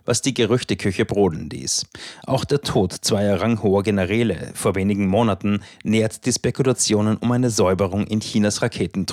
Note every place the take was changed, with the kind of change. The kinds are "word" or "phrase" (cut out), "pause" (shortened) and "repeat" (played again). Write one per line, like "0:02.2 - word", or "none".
none